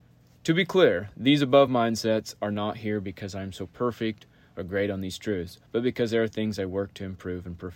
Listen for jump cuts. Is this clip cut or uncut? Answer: uncut